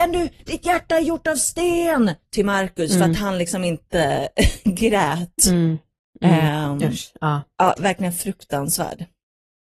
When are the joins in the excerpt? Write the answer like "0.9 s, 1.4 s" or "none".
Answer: none